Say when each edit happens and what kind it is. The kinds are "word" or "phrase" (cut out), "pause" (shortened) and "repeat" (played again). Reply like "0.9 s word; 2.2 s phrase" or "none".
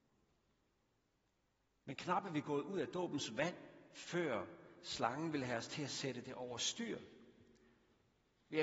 none